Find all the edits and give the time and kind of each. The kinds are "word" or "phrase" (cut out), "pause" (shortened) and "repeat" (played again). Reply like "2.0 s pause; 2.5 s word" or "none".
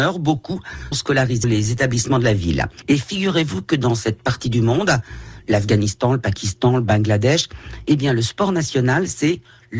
0.9 s word; 1.4 s word